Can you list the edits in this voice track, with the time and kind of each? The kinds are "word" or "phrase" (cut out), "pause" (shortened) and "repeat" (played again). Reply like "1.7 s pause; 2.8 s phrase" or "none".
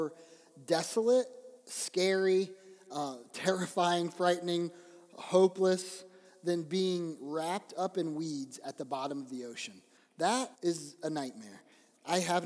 1.6 s pause; 10.5 s pause